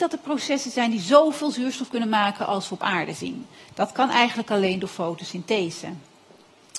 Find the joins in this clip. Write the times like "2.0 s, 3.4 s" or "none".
none